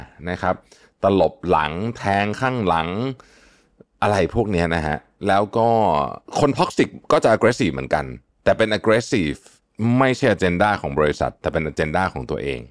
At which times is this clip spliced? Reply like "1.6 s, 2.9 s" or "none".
none